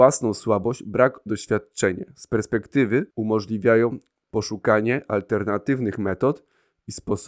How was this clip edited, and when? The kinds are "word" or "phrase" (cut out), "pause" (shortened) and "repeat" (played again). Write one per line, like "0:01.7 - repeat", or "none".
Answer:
0:01.3 - phrase
0:03.1 - pause

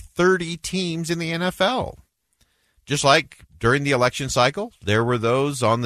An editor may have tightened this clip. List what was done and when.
none

